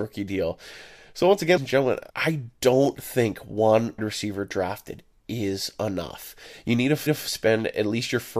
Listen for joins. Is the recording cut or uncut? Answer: cut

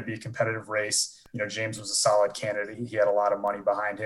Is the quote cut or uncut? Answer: uncut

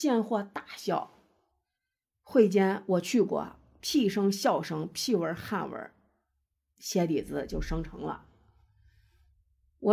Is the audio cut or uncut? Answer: uncut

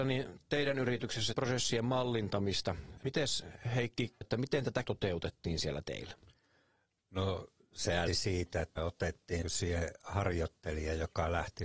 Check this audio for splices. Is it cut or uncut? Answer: cut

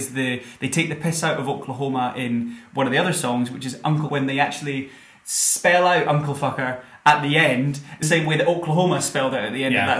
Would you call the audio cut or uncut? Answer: cut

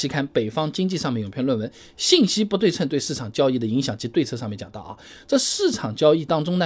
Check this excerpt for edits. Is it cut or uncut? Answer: uncut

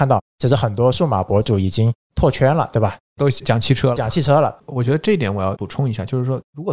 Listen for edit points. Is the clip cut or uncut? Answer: cut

